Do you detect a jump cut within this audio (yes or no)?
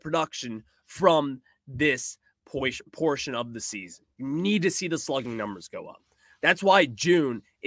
no